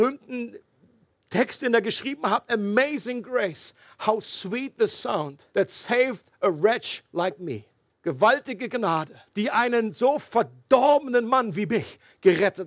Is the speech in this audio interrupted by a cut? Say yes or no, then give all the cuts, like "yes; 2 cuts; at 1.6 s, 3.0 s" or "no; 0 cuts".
yes; 3 cuts; at 5.5 s, 7.9 s, 9.3 s